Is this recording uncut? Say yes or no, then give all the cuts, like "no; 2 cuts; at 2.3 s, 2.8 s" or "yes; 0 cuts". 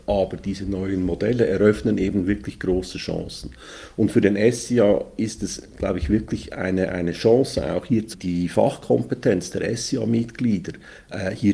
no; 1 cut; at 8.1 s